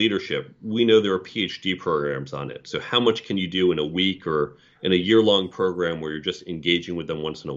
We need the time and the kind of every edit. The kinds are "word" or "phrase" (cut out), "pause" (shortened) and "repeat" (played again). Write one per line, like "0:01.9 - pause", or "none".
none

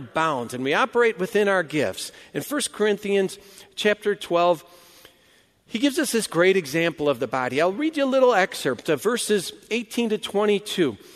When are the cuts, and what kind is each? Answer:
none

